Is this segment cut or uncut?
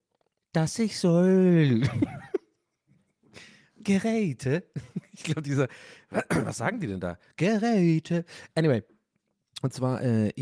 uncut